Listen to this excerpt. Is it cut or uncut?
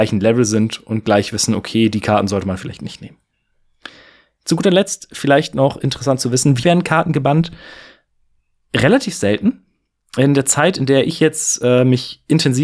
cut